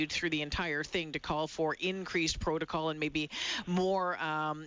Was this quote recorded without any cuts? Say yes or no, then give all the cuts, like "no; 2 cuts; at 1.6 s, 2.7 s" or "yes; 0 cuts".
yes; 0 cuts